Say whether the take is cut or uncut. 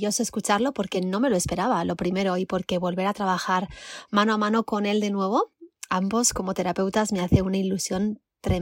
uncut